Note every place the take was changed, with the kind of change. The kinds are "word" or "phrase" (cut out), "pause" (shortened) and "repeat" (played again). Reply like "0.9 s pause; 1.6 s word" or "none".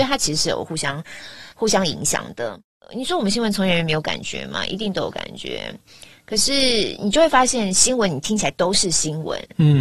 1.5 s pause